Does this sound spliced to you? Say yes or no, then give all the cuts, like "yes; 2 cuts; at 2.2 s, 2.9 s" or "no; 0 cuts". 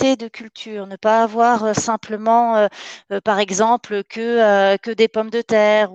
no; 0 cuts